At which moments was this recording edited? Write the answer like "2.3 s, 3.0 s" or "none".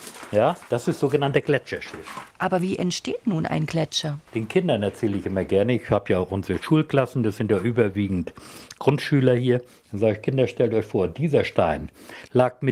2.3 s, 4.3 s